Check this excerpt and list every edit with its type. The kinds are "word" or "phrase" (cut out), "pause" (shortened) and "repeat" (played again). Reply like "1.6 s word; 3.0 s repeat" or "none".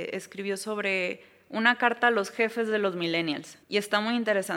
3.6 s pause